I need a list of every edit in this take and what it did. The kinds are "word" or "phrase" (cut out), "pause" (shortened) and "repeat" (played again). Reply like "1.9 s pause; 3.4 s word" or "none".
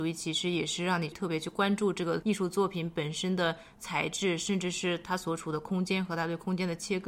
none